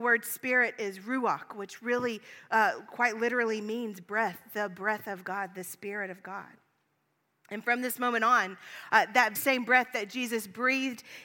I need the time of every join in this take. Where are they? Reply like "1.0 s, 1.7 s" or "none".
9.3 s